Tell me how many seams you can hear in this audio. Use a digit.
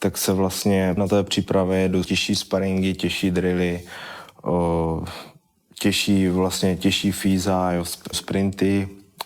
3